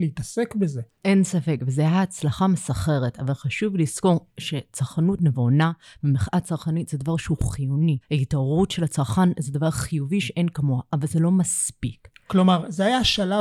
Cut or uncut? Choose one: uncut